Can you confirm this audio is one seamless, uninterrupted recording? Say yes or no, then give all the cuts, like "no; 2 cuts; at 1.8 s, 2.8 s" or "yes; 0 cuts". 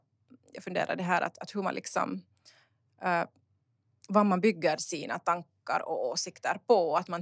yes; 0 cuts